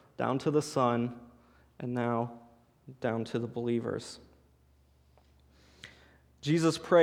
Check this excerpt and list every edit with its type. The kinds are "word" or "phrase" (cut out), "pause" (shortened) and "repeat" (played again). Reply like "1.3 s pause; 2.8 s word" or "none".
none